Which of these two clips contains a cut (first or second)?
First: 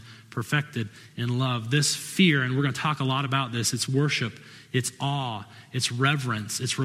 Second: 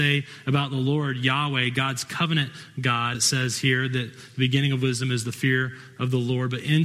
second